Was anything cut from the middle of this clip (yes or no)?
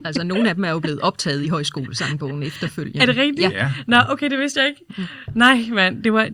no